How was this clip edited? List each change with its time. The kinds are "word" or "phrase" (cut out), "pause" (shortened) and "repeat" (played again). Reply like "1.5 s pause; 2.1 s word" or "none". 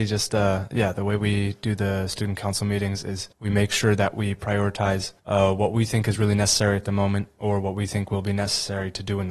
3.3 s pause; 5.2 s pause